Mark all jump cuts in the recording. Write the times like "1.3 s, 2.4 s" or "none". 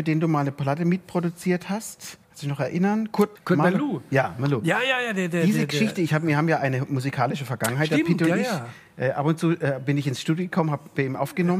2.2 s